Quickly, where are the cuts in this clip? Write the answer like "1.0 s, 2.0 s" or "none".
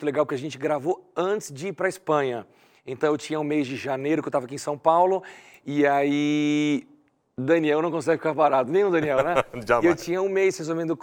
none

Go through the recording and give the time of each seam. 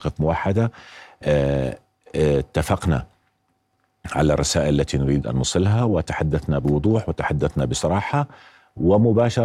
none

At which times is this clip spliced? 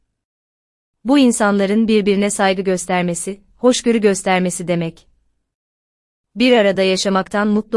none

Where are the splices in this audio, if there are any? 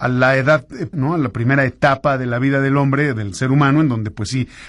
0.9 s

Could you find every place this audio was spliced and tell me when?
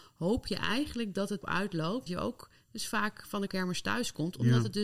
1.4 s, 2.1 s, 3.5 s

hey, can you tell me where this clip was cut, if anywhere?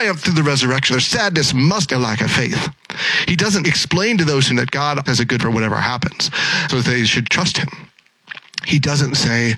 0.9 s, 1.9 s, 3.6 s, 4.5 s, 5.1 s, 5.4 s, 6.7 s, 7.2 s

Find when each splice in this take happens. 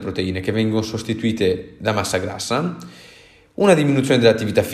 none

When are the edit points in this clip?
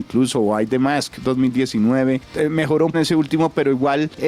2.9 s

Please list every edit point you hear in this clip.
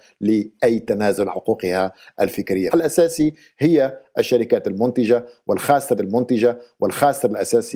1.3 s, 2.7 s, 6.0 s

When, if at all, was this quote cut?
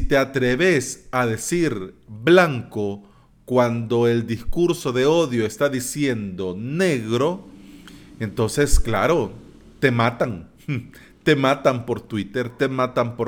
none

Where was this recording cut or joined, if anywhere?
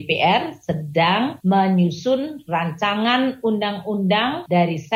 none

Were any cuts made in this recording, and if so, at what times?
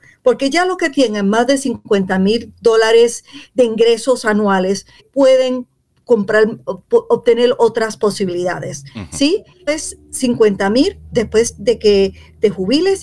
5.0 s, 9.7 s

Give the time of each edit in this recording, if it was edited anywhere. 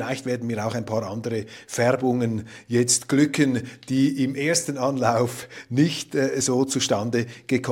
none

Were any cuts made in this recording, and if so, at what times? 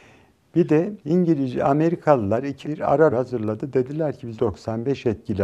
1.0 s, 2.6 s, 3.1 s, 4.4 s

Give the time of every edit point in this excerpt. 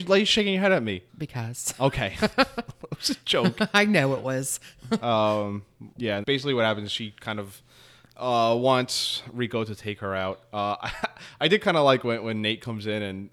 1.1 s, 5.9 s, 6.2 s

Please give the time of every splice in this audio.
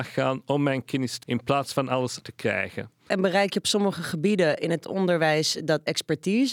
1.2 s, 2.2 s, 4.8 s

